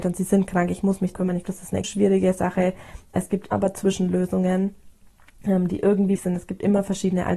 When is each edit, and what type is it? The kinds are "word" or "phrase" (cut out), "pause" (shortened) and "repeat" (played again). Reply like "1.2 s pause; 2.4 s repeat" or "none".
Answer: 1.1 s word; 1.4 s word; 1.8 s word; 3.5 s word; 6.2 s word